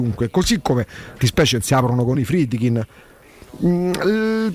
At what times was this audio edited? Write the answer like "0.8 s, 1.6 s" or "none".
1.2 s, 2.1 s